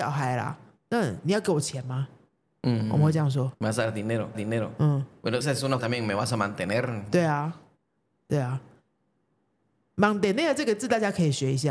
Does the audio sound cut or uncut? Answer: cut